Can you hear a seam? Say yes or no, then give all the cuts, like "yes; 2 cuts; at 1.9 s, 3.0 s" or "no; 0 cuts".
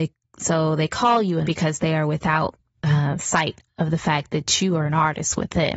yes; 1 cut; at 1.4 s